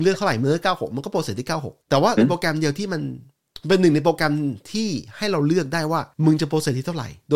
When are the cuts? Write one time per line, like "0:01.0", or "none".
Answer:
0:01.8
0:02.2
0:06.1

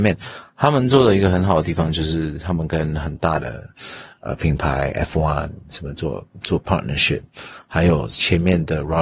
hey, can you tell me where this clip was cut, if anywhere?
0:06.3

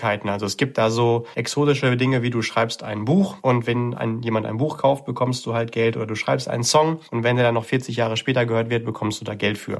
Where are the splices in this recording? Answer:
0:07.1

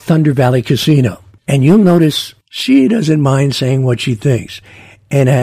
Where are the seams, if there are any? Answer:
0:02.4

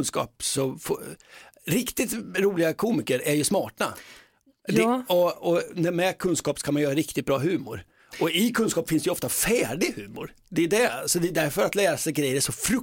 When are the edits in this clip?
none

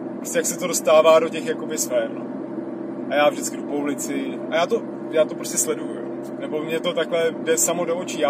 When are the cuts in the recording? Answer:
0:01.3

